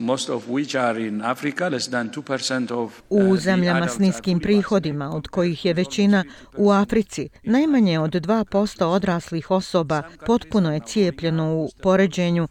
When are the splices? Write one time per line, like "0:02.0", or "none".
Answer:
0:03.0
0:07.4